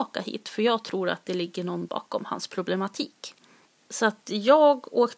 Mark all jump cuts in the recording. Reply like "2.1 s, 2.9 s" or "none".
1.9 s